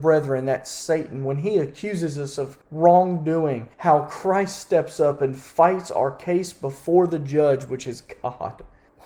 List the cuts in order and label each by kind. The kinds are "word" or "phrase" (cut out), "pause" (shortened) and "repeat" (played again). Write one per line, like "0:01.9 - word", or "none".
0:03.7 - pause